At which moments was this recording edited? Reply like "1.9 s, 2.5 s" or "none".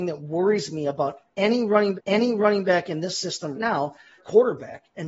1.9 s, 3.5 s, 4.2 s